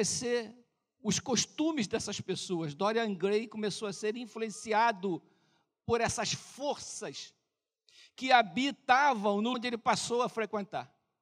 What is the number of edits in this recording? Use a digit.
1